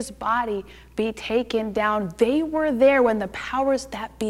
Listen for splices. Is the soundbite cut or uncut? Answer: uncut